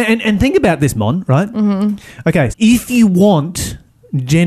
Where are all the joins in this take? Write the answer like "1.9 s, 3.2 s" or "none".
2.5 s